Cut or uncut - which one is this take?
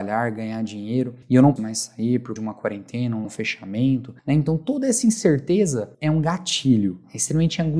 cut